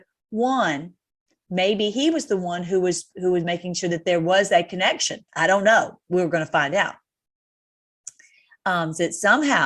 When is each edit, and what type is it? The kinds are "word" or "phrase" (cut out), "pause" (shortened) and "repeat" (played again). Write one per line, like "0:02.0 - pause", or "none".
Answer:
0:05.3 - pause